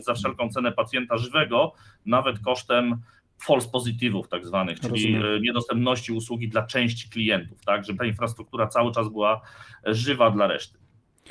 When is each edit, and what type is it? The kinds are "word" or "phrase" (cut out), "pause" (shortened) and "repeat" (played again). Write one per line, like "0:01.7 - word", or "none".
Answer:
0:08.0 - word